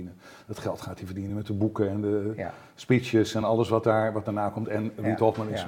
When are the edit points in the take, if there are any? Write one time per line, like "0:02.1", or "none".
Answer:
none

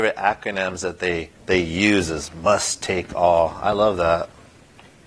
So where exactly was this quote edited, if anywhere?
0:01.4

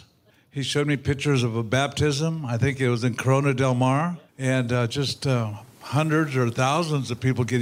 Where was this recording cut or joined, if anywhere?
0:04.3

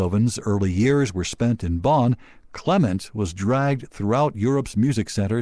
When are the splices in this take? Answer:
none

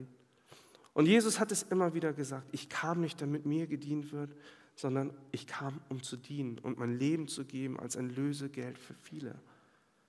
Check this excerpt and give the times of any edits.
none

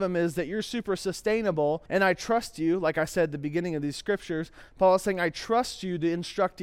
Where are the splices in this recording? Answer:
0:01.9

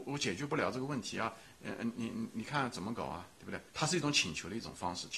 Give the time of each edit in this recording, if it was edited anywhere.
0:03.7

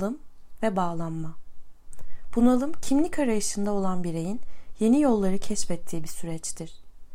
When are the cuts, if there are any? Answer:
none

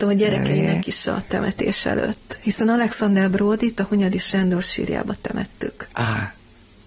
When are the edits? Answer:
0:05.9

